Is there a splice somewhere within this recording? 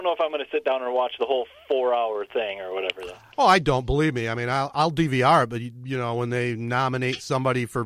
no; 0 cuts

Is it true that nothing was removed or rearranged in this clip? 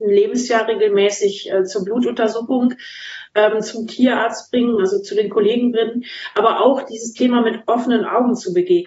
yes; 0 cuts

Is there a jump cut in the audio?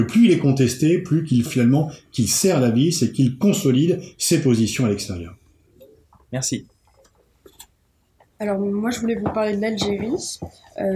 yes; 1 cut; at 1.5 s

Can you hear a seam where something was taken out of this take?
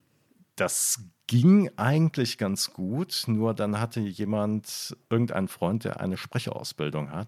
yes; 1 cut; at 5.0 s

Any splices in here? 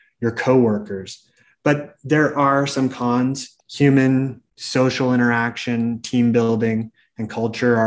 yes; 1 cut; at 3.6 s

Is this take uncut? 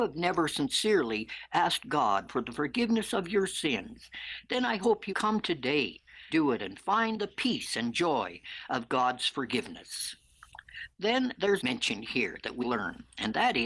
no; 4 cuts; at 5.1 s, 6.3 s, 11.6 s, 12.6 s

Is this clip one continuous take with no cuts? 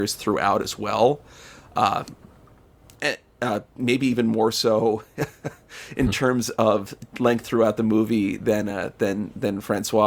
yes; 0 cuts

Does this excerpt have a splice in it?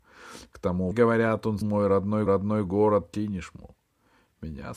yes; 3 cuts; at 0.9 s, 1.6 s, 2.3 s

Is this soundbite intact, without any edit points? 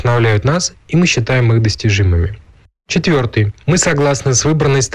yes; 0 cuts

